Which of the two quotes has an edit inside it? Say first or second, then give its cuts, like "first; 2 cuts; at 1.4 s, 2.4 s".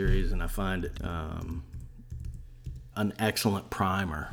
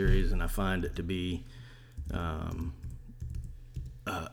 first; 2 cuts; at 1.0 s, 2.9 s